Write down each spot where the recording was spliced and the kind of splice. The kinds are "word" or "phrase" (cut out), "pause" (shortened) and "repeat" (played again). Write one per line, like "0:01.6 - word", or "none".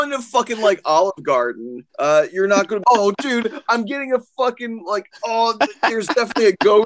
0:01.9 - pause
0:02.8 - word

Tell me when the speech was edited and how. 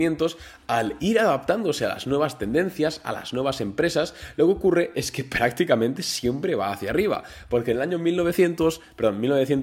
none

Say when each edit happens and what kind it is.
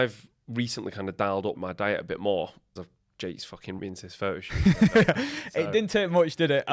0:01.5 - word
0:02.8 - word
0:03.8 - word

